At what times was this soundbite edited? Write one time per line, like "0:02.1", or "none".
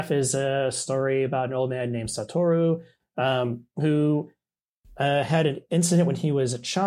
none